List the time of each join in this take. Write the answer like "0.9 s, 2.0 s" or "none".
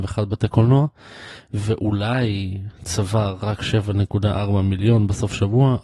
none